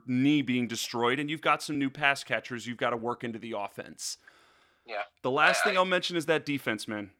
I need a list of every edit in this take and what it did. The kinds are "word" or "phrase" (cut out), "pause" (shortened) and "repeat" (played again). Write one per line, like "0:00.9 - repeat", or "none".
none